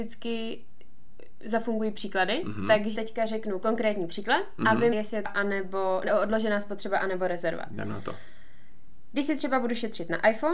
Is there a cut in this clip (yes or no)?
yes